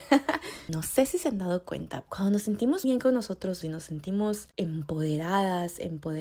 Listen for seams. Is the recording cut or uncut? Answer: cut